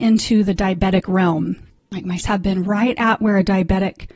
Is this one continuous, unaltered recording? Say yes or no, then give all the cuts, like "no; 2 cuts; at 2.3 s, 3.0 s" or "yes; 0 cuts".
no; 1 cut; at 2.2 s